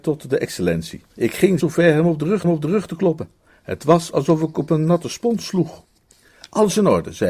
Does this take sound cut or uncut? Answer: cut